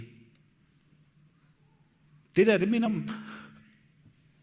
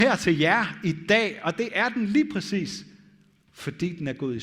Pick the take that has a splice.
first; 1 cut; at 2.9 s

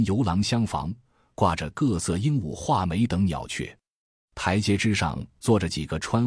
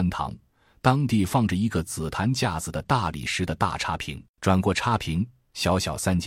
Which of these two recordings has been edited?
second; 1 cut; at 4.3 s

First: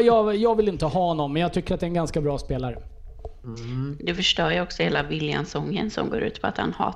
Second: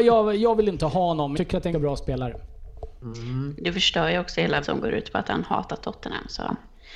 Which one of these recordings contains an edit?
second; 3 cuts; at 1.3 s, 1.7 s, 4.6 s

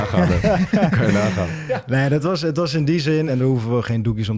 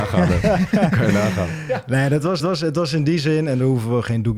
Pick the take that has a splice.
second; 1 cut; at 2.4 s

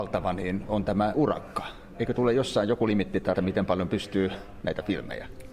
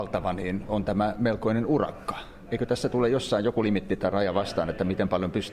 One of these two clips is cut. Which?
first; 4 cuts; at 1.1 s, 2.1 s, 3.3 s, 4.6 s

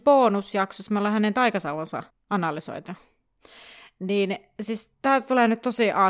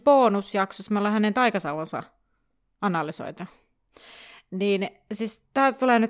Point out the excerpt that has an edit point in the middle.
first; 1 cut; at 2.1 s

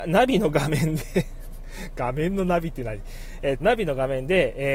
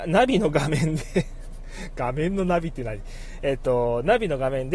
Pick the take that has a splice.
first; 1 cut; at 3.6 s

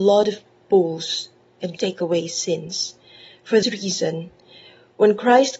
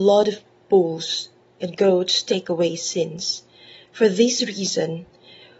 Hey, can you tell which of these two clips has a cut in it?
first; 2 cuts; at 1.8 s, 3.6 s

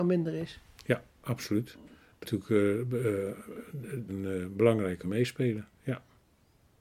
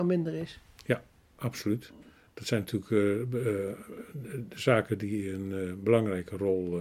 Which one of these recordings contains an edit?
first; 4 cuts; at 1.1 s, 2.2 s, 4.1 s, 5.0 s

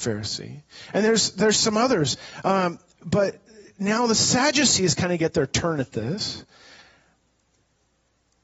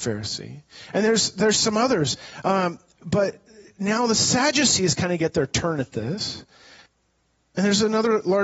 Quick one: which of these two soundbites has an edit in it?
second; 1 cut; at 6.9 s

